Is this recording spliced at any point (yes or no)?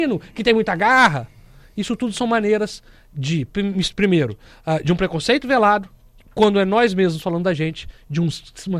no